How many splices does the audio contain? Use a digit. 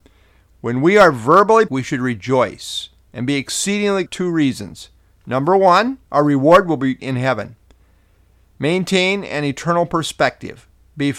4